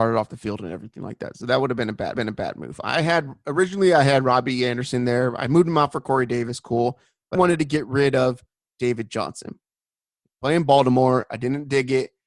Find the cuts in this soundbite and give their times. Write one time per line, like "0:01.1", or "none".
0:02.1
0:07.3